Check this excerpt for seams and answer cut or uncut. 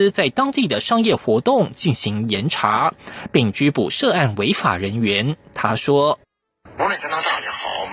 uncut